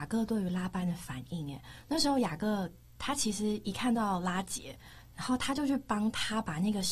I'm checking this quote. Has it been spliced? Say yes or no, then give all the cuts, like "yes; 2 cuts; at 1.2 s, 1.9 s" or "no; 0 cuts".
no; 0 cuts